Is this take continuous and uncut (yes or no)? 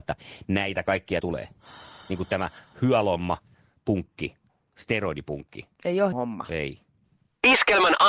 no